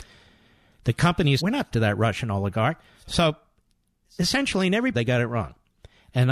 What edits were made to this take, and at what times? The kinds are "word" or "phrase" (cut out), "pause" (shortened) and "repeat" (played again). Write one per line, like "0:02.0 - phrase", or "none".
0:01.4 - word
0:01.7 - word
0:04.9 - word